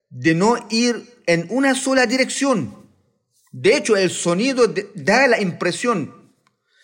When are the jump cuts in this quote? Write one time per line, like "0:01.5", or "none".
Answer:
none

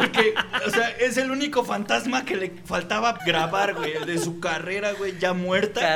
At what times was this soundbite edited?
0:03.2

